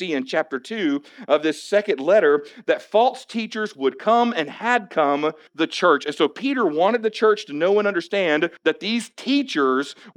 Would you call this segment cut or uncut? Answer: cut